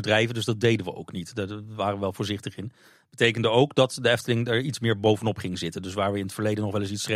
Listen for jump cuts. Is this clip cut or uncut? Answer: uncut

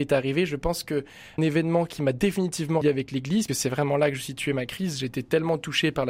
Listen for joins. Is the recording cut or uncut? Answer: cut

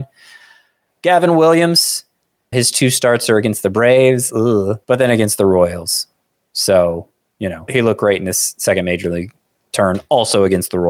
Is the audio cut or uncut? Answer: cut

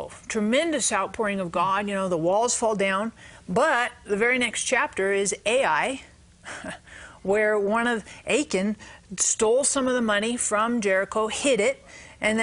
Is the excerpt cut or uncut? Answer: uncut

